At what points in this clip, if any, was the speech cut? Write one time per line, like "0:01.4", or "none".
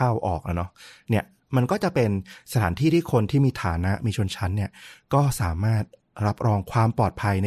none